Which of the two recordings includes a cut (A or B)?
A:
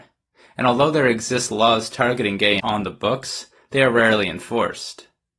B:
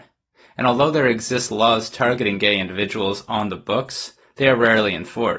A